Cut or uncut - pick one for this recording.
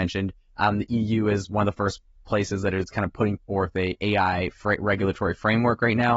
uncut